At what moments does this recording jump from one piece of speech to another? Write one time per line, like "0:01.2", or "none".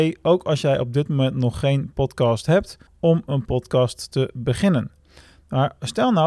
0:02.9

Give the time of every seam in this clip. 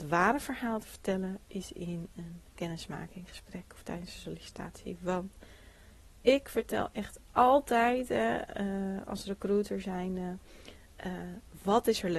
none

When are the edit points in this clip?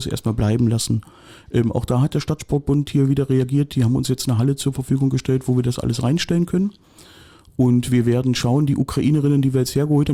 none

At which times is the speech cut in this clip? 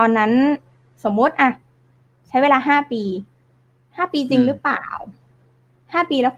none

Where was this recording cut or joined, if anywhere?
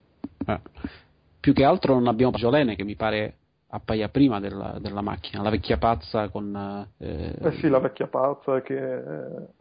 0:02.3
0:06.9

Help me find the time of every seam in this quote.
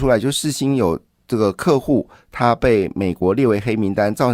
none

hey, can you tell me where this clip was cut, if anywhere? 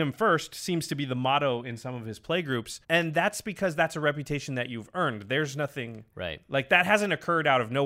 0:02.8

